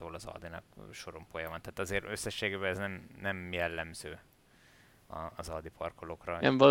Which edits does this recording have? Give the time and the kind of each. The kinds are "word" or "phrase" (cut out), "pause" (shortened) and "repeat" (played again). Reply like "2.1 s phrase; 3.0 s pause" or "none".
none